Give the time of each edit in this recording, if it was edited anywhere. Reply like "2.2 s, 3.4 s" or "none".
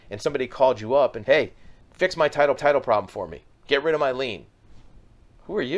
1.2 s, 1.8 s, 2.6 s, 3.5 s